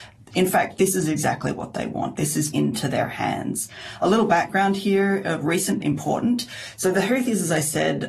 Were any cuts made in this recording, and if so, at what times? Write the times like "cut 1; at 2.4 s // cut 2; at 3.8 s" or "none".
cut 1; at 2.5 s // cut 2; at 5.8 s